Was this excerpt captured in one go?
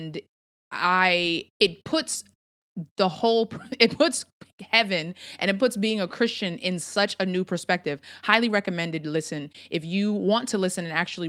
yes; 0 cuts

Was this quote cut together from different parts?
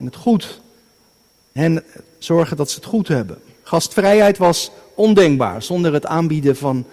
no; 0 cuts

